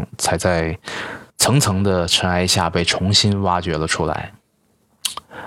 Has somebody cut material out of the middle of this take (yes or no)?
yes